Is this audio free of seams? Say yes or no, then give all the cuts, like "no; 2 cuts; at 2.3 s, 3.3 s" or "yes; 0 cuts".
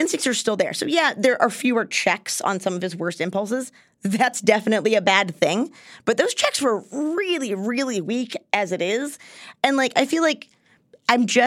yes; 0 cuts